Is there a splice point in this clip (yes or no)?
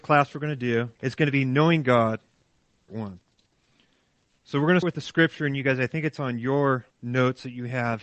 yes